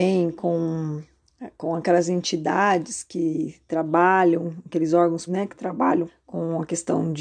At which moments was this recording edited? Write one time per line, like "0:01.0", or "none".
0:05.3
0:06.1